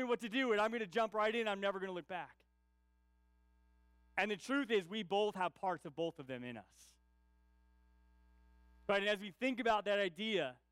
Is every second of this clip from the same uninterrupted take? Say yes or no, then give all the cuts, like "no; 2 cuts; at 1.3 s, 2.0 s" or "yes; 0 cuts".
yes; 0 cuts